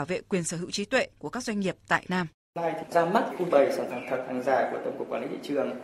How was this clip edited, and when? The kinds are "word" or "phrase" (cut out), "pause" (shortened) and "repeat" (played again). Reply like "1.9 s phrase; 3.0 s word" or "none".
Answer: 2.1 s word; 3.5 s word; 3.9 s word